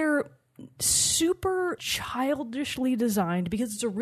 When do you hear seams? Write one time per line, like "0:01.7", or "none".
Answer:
0:01.8